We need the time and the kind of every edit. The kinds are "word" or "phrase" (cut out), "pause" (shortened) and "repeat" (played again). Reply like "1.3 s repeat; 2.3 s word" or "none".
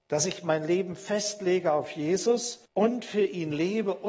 2.7 s pause